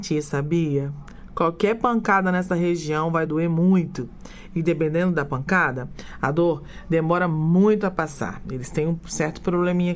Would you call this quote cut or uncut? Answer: uncut